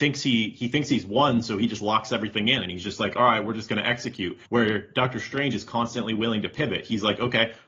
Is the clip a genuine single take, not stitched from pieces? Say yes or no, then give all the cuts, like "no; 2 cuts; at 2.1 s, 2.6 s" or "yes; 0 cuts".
no; 1 cut; at 4.5 s